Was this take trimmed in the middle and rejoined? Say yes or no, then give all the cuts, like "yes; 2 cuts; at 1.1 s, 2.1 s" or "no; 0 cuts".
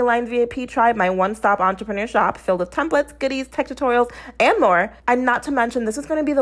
yes; 1 cut; at 5.0 s